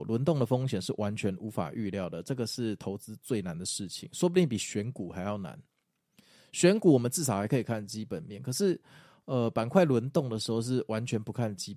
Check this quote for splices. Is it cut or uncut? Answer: uncut